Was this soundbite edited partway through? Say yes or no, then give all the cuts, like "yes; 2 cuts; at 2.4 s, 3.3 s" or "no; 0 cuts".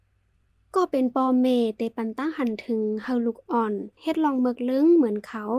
no; 0 cuts